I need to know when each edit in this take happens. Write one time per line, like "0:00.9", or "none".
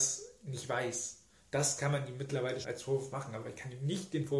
0:02.6